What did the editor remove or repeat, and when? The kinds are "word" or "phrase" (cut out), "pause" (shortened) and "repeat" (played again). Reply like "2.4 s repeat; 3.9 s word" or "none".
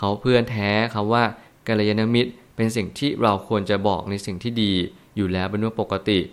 none